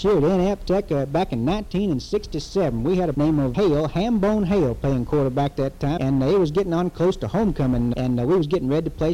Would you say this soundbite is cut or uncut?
cut